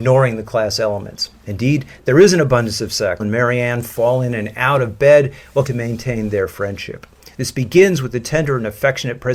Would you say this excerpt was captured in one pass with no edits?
no; 2 cuts; at 3.2 s, 5.7 s

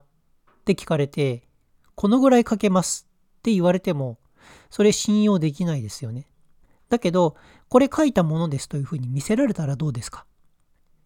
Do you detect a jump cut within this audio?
no; 0 cuts

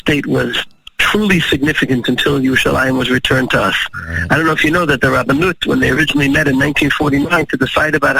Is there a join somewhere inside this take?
no; 0 cuts

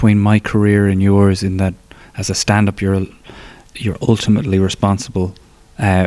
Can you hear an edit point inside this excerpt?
no; 0 cuts

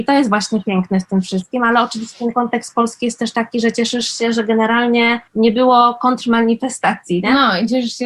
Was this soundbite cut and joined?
yes; 1 cut; at 5.3 s

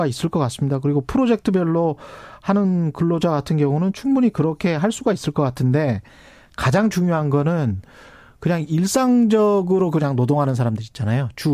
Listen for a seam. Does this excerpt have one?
no; 0 cuts

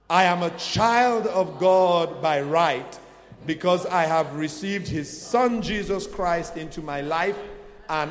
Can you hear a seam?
no; 0 cuts

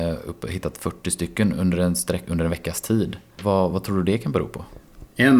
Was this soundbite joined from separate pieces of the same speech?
no; 0 cuts

